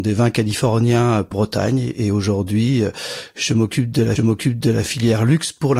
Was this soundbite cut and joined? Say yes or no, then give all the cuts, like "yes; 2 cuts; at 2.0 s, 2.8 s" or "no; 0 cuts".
yes; 2 cuts; at 1.3 s, 4.2 s